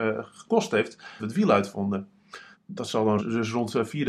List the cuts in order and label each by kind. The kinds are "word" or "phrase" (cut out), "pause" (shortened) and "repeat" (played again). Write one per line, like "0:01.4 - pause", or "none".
0:01.2 - word
0:02.5 - pause
0:03.2 - word